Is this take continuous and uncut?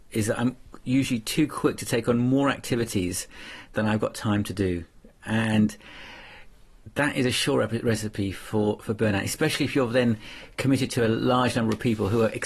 yes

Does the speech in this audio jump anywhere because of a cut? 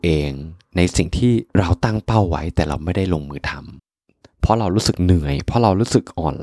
yes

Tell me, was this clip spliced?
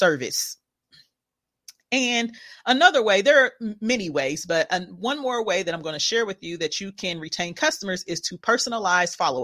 no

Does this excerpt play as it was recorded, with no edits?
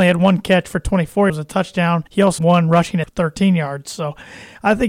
no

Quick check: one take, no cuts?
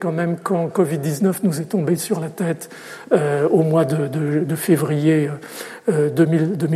yes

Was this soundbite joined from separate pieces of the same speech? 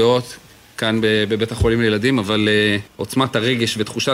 yes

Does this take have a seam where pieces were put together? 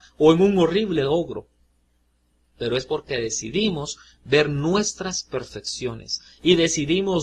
no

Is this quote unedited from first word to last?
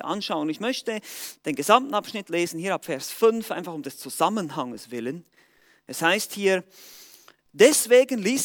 yes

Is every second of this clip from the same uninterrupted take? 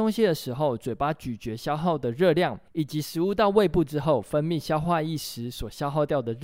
no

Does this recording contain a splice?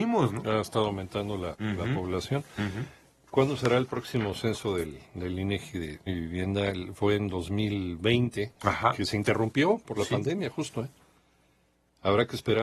yes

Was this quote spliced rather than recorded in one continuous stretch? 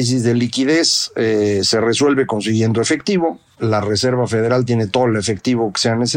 no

